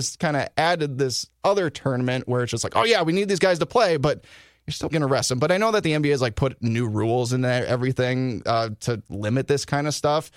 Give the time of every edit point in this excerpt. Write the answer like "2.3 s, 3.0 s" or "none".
4.9 s